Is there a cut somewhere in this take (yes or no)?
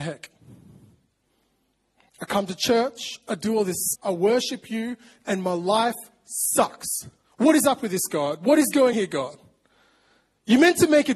yes